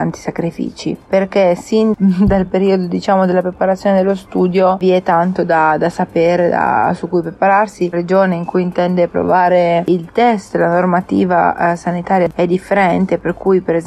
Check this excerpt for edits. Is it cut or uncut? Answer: cut